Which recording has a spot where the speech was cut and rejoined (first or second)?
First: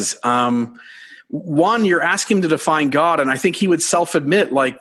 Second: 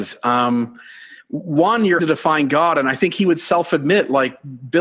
second